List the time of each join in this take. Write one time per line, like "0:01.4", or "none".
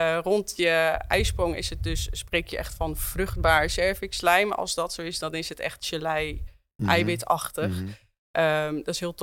none